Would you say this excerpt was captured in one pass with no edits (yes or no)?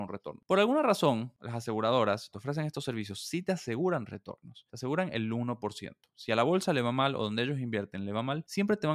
no